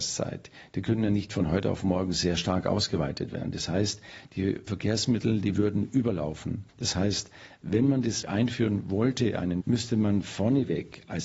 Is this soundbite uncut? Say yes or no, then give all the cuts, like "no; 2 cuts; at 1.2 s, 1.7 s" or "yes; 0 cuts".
no; 4 cuts; at 4.7 s, 6.7 s, 8.2 s, 9.6 s